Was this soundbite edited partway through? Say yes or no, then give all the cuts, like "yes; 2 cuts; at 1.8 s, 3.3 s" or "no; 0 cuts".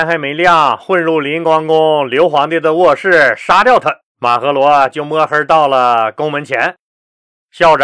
yes; 1 cut; at 4.1 s